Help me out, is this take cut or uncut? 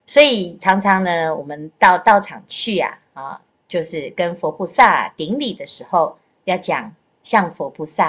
uncut